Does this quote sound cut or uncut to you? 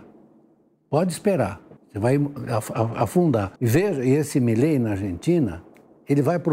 cut